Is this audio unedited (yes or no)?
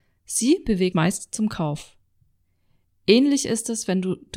no